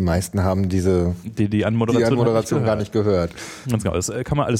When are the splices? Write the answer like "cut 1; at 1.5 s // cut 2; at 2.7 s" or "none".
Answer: cut 1; at 1.5 s